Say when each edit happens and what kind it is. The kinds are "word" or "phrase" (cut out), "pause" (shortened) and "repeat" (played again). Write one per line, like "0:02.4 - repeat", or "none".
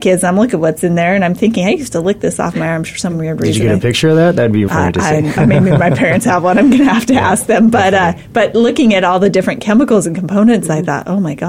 0:04.7 - word
0:05.4 - word

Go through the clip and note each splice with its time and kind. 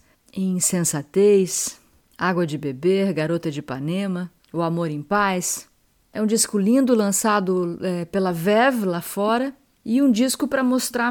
0:04.4 - pause

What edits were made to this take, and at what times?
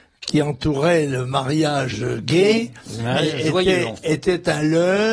none

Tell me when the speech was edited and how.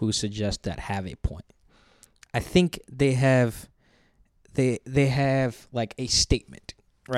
none

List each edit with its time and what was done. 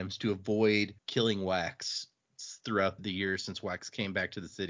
0:01.0 - pause
0:03.0 - word

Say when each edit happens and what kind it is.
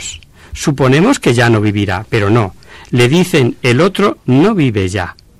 none

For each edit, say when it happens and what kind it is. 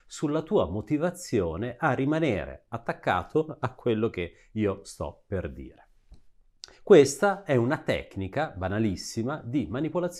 0:06.7 - pause

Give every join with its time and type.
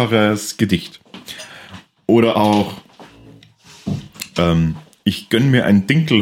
none

